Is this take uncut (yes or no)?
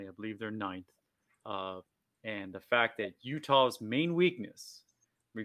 yes